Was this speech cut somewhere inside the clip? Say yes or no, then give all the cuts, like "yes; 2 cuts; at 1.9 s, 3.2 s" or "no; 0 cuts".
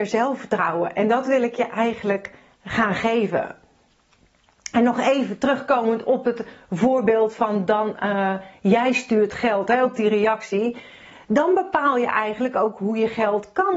no; 0 cuts